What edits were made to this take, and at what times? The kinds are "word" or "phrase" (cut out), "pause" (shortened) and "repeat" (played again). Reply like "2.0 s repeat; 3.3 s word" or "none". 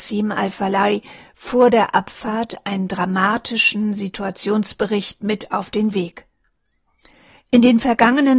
none